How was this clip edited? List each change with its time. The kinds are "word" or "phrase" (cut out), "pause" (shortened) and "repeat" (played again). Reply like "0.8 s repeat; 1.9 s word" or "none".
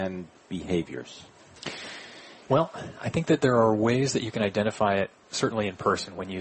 2.4 s pause